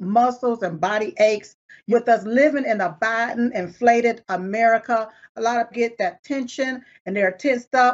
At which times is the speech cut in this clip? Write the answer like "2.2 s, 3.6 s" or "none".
1.9 s, 5.7 s